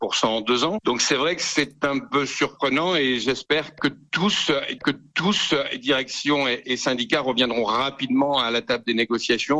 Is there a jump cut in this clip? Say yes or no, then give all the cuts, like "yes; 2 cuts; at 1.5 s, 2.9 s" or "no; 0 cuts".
yes; 1 cut; at 4.8 s